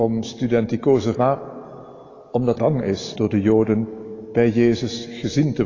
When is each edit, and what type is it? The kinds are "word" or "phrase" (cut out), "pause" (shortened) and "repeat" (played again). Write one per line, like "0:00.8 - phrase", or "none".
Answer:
0:01.1 - word
0:02.6 - word
0:03.1 - word